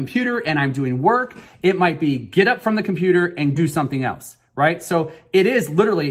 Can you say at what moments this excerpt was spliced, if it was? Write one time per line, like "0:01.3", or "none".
0:03.6